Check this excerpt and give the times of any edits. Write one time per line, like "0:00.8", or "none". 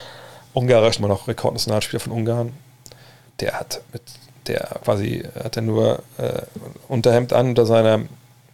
0:01.0
0:03.3
0:03.8
0:04.8

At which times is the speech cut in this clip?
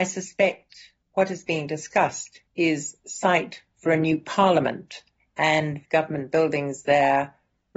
0:02.5
0:05.8

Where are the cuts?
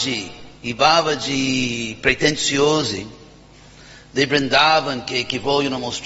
none

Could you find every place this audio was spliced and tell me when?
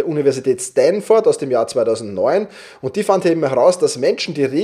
none

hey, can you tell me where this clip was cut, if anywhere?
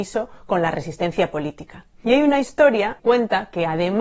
0:03.0

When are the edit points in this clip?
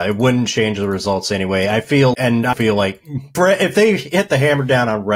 0:02.1
0:02.5
0:03.3

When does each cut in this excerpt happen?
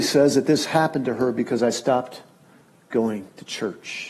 none

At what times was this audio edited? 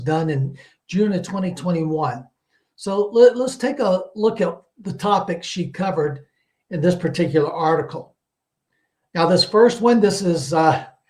none

